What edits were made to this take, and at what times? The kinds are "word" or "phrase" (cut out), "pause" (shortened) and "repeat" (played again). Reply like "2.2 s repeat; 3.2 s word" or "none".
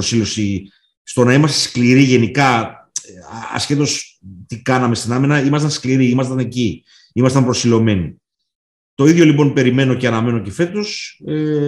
none